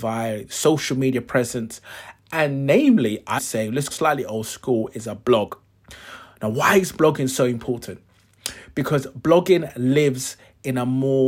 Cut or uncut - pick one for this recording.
cut